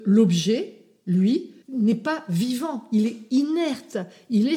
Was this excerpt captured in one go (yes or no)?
no